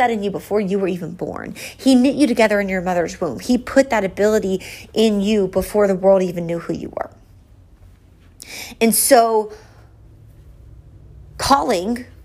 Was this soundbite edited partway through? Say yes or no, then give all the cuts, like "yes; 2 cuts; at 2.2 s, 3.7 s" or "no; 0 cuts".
no; 0 cuts